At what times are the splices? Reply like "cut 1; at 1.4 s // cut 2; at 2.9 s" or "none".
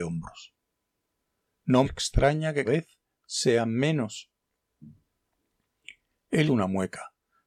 cut 1; at 1.8 s // cut 2; at 2.6 s // cut 3; at 6.5 s